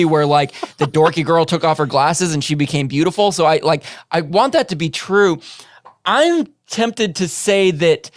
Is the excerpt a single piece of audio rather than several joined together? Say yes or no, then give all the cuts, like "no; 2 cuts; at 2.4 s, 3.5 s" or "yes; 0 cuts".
yes; 0 cuts